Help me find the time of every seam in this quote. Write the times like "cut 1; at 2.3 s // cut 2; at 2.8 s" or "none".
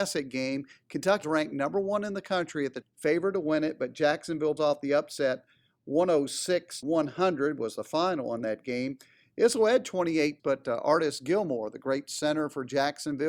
cut 1; at 1.2 s // cut 2; at 2.8 s // cut 3; at 4.6 s // cut 4; at 6.8 s // cut 5; at 10.4 s